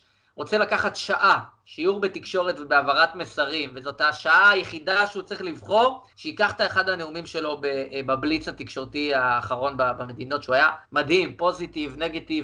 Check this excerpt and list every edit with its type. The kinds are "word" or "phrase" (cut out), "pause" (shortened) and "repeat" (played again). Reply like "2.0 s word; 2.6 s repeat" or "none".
6.1 s pause; 10.8 s pause